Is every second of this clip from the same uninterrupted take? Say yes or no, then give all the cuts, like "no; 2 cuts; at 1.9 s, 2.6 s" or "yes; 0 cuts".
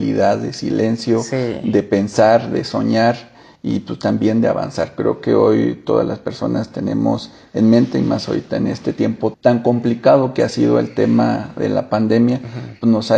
no; 1 cut; at 9.3 s